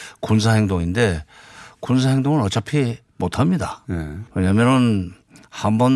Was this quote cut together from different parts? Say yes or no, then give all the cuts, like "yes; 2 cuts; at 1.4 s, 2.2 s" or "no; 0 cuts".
yes; 1 cut; at 4.3 s